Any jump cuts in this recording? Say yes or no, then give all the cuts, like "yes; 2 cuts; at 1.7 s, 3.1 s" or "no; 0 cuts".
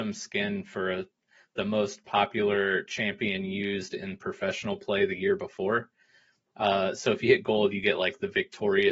no; 0 cuts